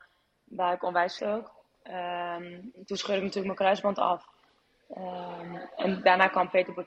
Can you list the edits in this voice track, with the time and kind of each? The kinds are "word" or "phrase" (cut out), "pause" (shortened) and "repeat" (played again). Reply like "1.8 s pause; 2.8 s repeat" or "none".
1.2 s phrase